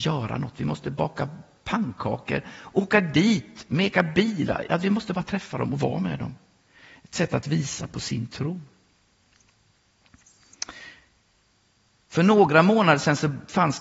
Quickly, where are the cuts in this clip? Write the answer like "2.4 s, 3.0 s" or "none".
none